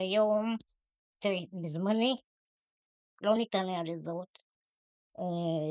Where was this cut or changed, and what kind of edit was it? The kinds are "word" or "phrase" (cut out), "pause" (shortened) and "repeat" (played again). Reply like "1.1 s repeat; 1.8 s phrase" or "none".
none